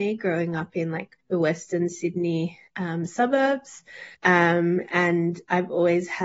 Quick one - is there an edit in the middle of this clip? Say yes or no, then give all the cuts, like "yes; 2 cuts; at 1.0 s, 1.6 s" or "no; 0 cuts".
yes; 3 cuts; at 1.2 s, 2.7 s, 4.1 s